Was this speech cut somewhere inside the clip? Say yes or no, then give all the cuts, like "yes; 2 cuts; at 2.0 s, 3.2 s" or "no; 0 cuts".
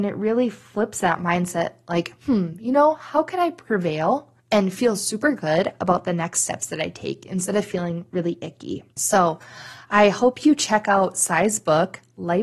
yes; 2 cuts; at 4.4 s, 8.9 s